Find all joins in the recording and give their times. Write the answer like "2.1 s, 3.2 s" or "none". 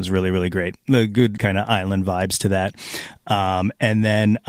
1.4 s